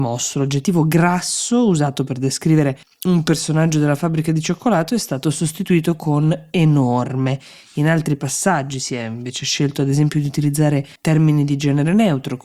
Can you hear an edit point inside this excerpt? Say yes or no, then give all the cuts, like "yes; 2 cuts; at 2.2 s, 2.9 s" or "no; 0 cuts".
yes; 2 cuts; at 2.8 s, 11.0 s